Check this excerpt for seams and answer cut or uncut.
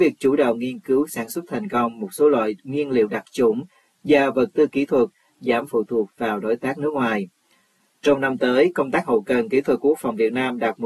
uncut